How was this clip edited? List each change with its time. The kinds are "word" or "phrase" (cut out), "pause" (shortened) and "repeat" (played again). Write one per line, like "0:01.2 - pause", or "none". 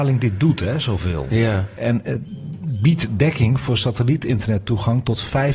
none